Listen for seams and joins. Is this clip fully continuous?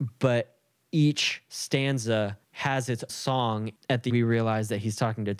no; 3 cuts; at 2.4 s, 3.1 s, 4.1 s

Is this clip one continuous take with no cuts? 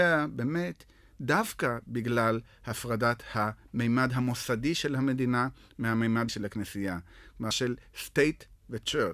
no; 2 cuts; at 6.3 s, 7.5 s

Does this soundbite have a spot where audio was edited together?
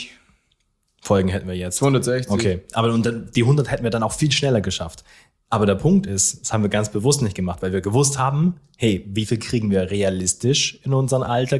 no; 0 cuts

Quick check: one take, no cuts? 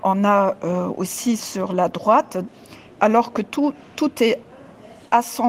yes; 0 cuts

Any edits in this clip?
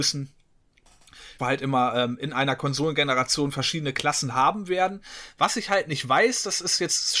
yes; 1 cut; at 1.4 s

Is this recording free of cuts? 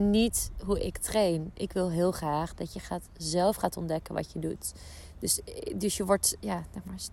yes; 0 cuts

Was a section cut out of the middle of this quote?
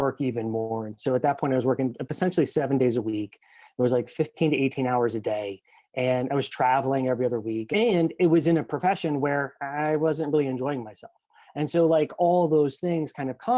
no; 0 cuts

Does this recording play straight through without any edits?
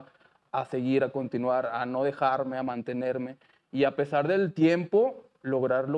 yes; 0 cuts

